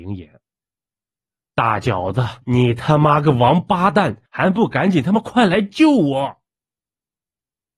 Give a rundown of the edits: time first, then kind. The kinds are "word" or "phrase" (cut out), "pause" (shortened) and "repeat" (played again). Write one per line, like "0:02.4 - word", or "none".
0:02.4 - pause
0:04.3 - pause